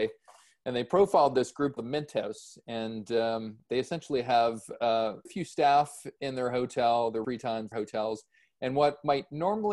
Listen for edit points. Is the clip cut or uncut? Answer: cut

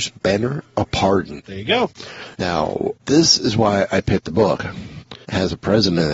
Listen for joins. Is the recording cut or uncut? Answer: uncut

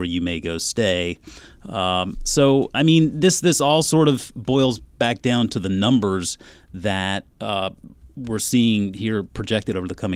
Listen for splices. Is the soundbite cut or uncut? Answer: uncut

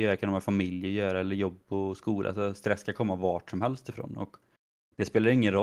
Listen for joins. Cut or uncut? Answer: uncut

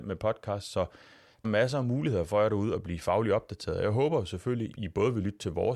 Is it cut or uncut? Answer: cut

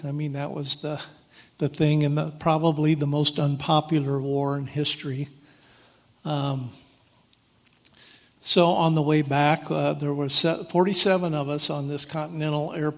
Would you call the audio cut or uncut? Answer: uncut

